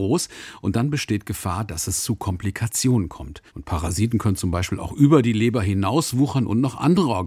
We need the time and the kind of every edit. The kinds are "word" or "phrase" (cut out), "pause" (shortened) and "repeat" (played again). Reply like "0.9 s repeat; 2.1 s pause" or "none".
3.5 s pause

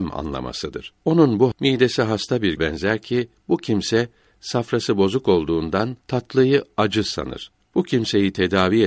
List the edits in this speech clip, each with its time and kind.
1.5 s word; 2.6 s word

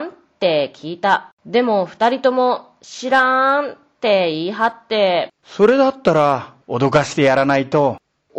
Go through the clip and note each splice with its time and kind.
1.4 s pause; 5.4 s pause; 6.6 s pause

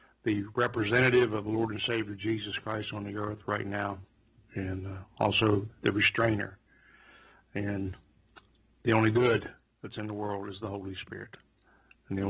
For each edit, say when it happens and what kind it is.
none

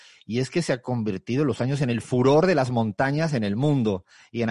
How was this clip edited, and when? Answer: 1.6 s word

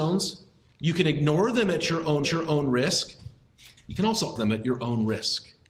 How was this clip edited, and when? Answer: 2.2 s repeat; 4.4 s word

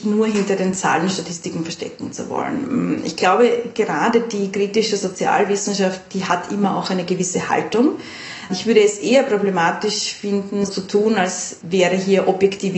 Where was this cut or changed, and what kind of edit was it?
10.7 s word

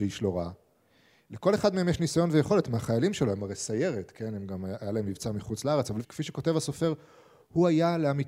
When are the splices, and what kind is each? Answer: 6.0 s word

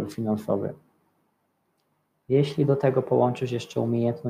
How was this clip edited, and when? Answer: none

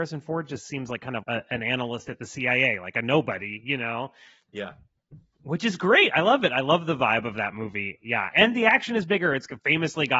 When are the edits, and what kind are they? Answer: 1.2 s word; 8.3 s word

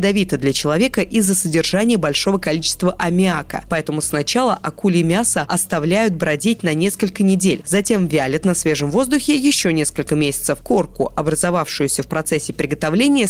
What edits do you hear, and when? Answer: none

